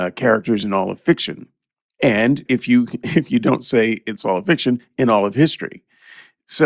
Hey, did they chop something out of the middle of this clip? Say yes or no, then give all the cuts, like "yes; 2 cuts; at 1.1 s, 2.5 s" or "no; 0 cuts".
yes; 1 cut; at 2.4 s